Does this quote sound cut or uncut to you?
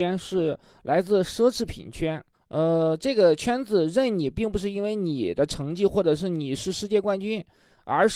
cut